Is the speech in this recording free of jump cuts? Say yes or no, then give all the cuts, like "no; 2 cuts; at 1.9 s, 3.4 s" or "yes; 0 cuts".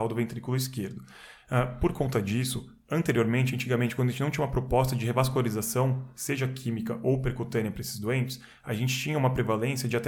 yes; 0 cuts